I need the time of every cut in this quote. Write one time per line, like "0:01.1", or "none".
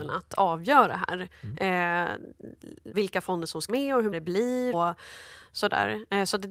0:02.9
0:03.7
0:04.1
0:04.7